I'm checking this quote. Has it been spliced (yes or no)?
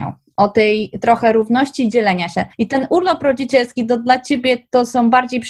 yes